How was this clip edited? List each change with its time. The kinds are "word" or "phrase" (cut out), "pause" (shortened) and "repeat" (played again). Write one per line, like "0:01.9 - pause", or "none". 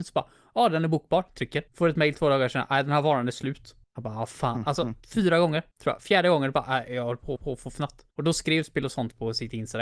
0:01.7 - pause
0:03.8 - pause
0:05.7 - pause
0:07.4 - repeat
0:08.1 - pause

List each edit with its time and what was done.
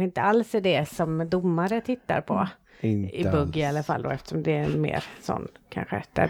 none

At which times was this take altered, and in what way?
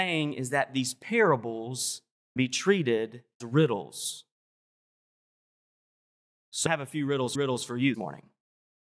0:02.4 - word
0:03.4 - word
0:06.7 - word
0:07.3 - repeat
0:07.9 - word

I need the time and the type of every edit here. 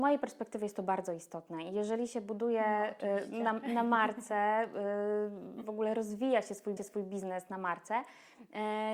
0:06.8 - repeat

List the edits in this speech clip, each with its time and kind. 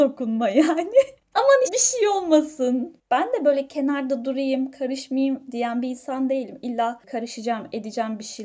0:01.7 - word

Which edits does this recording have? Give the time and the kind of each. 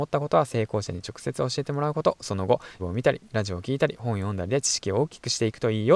0:02.8 - word

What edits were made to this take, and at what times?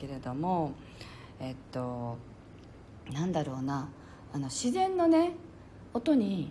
0:03.0 - pause

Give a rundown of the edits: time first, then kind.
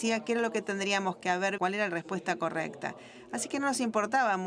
0:01.6 - word

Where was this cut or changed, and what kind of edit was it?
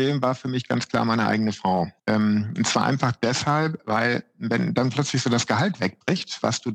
0:02.0 - pause

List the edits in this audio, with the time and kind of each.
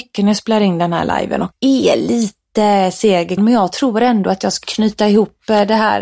0:01.5 - word
0:03.4 - word
0:04.6 - word

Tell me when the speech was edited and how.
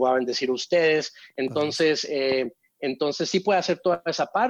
none

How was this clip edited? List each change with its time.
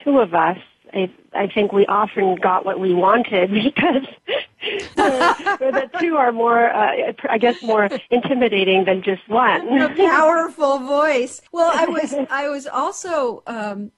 0:04.2 - pause
0:11.5 - pause

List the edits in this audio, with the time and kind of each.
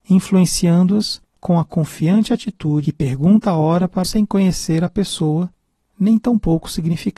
0:01.3 - pause
0:02.8 - phrase
0:04.0 - phrase

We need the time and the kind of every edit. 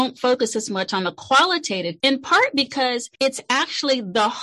0:02.0 - word
0:03.2 - pause

